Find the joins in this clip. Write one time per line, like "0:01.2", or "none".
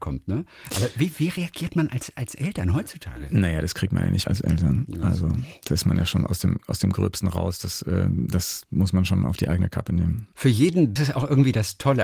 0:04.2
0:10.3
0:11.0